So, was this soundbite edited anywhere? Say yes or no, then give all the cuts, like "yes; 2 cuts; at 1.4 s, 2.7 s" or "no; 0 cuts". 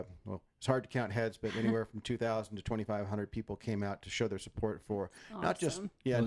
no; 0 cuts